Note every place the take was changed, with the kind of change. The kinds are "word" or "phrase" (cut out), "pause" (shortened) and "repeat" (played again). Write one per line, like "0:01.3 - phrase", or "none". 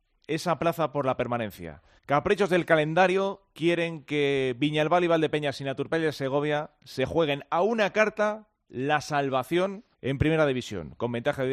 0:02.0 - pause
0:09.9 - pause